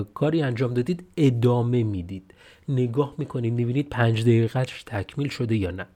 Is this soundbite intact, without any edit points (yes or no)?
yes